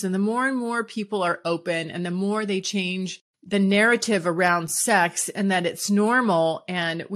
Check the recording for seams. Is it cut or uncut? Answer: uncut